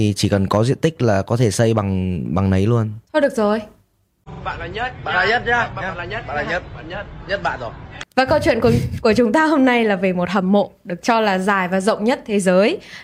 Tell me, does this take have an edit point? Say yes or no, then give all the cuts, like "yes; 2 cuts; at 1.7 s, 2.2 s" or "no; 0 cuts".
yes; 2 cuts; at 3.0 s, 8.1 s